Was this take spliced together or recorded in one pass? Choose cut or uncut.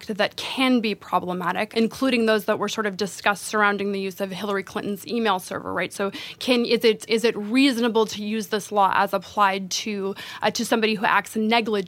cut